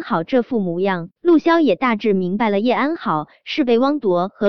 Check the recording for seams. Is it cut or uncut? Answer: cut